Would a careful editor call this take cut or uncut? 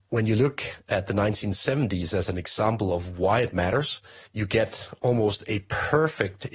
cut